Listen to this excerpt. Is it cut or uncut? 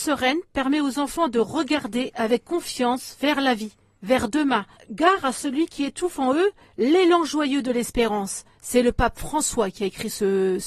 uncut